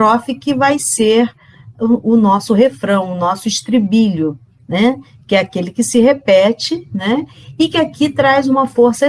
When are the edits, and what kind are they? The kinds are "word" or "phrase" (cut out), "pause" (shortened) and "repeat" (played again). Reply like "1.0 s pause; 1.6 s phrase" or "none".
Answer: none